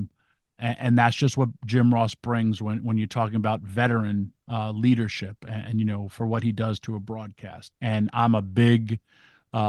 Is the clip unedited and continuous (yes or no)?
no